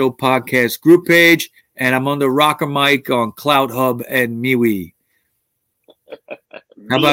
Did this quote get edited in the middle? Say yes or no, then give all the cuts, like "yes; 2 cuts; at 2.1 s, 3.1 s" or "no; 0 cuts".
yes; 1 cut; at 1.6 s